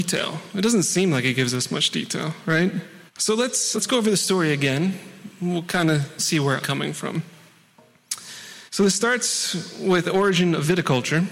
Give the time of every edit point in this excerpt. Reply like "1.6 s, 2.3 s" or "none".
3.1 s, 3.7 s, 6.2 s, 6.6 s, 8.7 s, 10.0 s